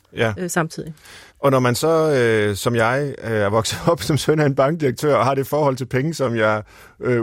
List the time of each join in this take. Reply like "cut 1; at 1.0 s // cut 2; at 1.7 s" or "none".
cut 1; at 1.3 s